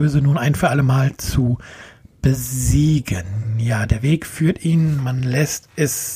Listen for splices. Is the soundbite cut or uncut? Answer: uncut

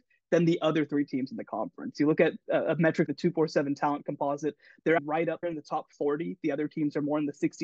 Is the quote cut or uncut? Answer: cut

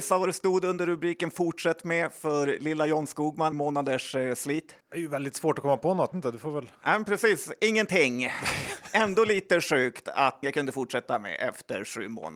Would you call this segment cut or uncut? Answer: cut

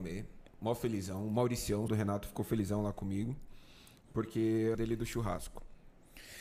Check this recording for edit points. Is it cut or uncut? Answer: cut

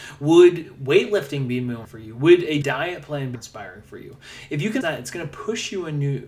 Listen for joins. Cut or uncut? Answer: cut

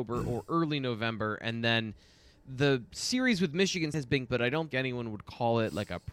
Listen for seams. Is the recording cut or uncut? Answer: cut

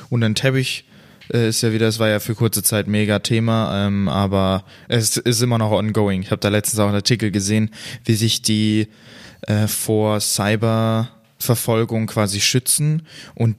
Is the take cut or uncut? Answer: uncut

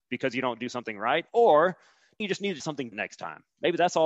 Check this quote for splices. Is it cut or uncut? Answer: cut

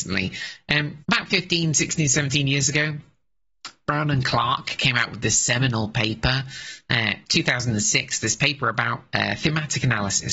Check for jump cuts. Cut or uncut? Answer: cut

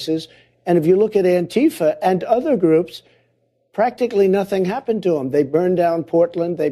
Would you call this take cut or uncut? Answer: uncut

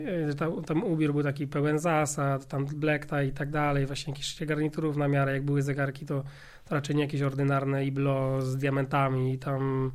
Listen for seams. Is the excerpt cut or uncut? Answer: uncut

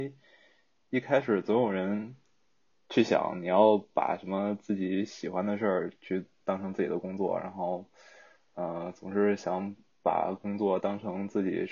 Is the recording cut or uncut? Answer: uncut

